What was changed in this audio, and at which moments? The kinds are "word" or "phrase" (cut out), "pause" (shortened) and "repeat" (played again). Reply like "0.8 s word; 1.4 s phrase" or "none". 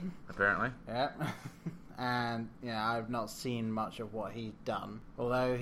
none